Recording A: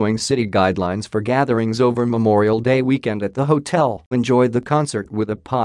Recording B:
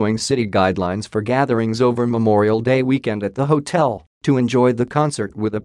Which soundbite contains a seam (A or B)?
A